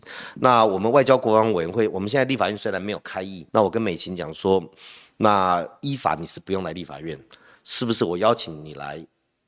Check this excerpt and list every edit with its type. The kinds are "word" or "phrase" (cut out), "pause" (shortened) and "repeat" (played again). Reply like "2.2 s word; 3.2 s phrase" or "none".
3.5 s pause